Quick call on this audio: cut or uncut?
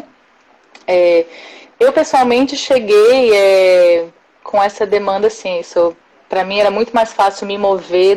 uncut